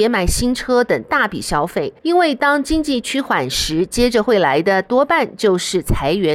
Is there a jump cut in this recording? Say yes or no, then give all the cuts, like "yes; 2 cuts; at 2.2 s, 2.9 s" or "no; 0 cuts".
yes; 1 cut; at 2.0 s